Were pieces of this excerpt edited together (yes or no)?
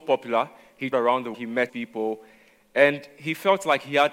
yes